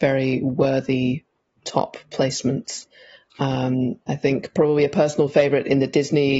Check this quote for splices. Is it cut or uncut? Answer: uncut